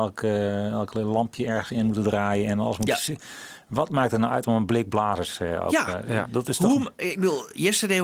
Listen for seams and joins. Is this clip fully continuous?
yes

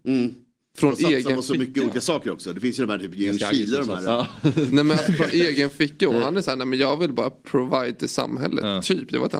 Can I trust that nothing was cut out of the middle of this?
yes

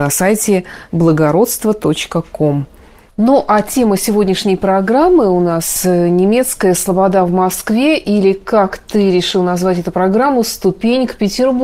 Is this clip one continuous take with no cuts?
yes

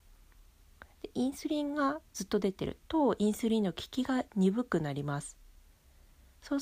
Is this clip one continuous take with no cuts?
no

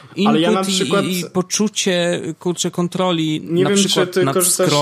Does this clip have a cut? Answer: no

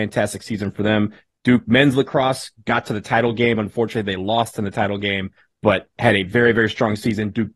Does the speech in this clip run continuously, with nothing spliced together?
yes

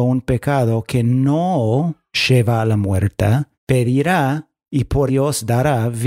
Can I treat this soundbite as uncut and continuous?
no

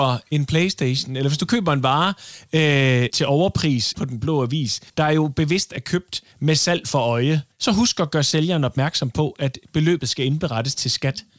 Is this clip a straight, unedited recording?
no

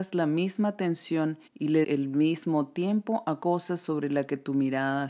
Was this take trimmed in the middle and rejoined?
yes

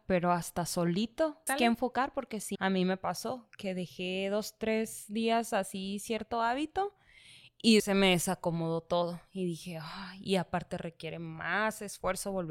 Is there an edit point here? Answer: yes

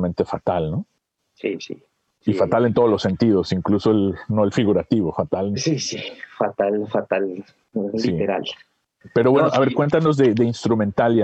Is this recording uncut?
yes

